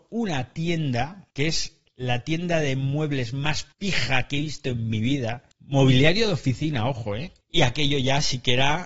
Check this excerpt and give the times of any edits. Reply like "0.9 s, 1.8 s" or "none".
1.3 s, 3.7 s, 5.5 s, 7.4 s